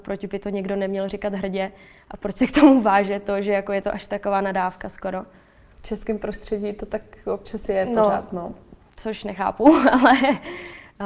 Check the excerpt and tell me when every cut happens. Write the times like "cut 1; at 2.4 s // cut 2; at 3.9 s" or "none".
none